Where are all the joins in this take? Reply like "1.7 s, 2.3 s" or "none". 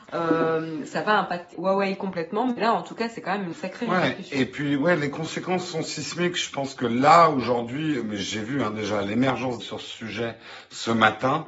1.5 s, 3.5 s, 9.6 s